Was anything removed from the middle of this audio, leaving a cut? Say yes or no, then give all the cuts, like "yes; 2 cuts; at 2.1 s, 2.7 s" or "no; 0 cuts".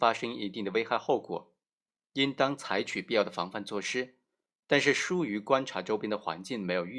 no; 0 cuts